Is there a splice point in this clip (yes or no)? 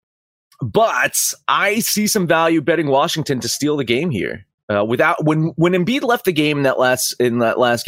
no